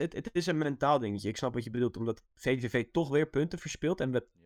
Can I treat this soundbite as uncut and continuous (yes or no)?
no